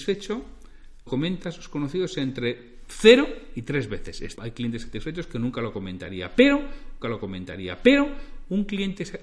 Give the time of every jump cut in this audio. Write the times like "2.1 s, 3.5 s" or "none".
1.1 s, 4.4 s, 7.0 s